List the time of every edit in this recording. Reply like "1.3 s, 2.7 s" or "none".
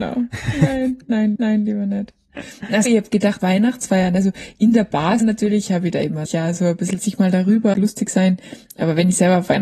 1.3 s, 2.9 s, 3.4 s, 5.2 s, 6.3 s, 7.0 s, 7.7 s